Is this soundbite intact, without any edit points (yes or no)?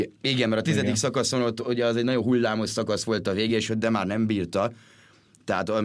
yes